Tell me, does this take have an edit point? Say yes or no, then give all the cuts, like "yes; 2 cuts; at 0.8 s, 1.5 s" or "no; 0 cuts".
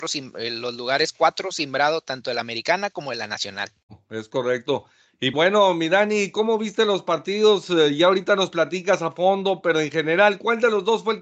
yes; 1 cut; at 5.3 s